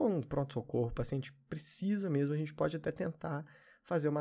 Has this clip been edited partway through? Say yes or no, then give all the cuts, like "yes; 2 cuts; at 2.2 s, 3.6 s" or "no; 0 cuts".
no; 0 cuts